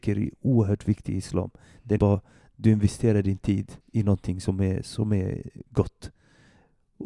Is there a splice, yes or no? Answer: yes